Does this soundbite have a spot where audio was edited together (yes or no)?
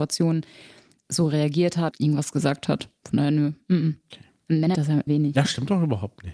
yes